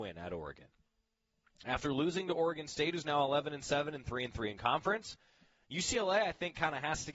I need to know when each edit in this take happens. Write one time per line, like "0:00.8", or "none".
none